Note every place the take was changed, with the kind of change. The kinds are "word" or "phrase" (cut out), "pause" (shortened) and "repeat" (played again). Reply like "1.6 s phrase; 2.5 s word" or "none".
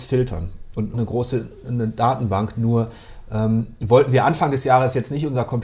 0.9 s phrase